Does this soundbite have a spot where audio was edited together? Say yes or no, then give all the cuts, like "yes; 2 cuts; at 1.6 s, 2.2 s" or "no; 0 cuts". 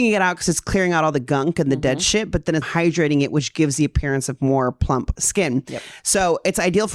yes; 1 cut; at 2.6 s